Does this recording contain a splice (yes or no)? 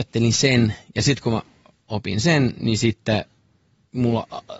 no